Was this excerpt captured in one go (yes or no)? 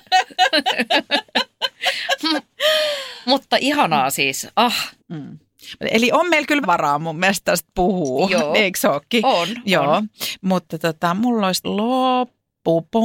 no